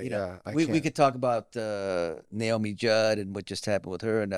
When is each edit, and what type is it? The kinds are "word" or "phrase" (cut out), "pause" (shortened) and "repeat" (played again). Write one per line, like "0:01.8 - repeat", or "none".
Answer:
none